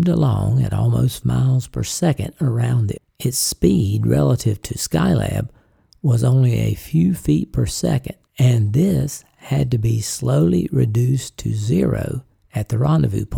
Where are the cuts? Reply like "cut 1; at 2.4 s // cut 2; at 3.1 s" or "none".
cut 1; at 1.2 s // cut 2; at 3.0 s // cut 3; at 8.3 s